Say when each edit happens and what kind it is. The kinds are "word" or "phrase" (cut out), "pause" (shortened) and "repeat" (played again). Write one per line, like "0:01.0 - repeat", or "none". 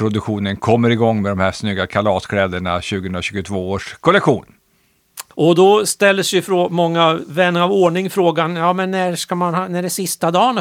0:05.3 - pause